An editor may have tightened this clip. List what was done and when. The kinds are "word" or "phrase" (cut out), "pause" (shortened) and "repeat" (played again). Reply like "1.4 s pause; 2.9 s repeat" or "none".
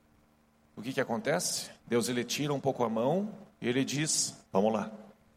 1.8 s pause; 3.5 s pause; 4.4 s pause